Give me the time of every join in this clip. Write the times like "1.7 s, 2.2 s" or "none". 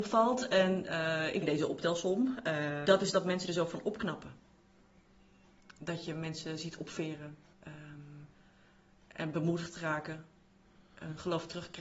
1.4 s, 2.8 s, 7.5 s